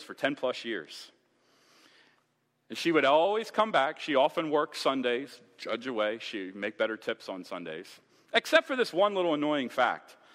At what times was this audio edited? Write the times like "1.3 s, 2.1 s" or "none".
none